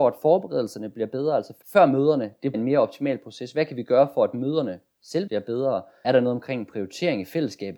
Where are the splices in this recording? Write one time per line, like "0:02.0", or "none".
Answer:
0:01.6
0:02.5
0:05.3
0:06.0